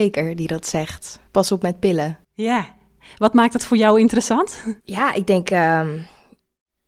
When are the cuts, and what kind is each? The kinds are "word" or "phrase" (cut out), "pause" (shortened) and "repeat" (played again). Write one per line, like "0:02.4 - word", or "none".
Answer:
0:01.3 - pause
0:02.2 - pause
0:04.8 - pause